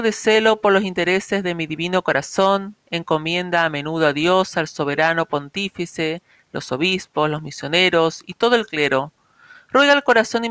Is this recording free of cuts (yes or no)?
yes